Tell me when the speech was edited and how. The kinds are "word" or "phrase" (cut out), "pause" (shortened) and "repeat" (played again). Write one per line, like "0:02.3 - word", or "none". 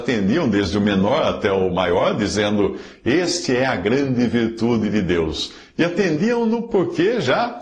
none

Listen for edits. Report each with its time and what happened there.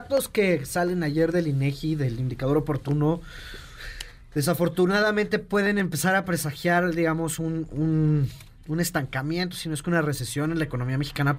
none

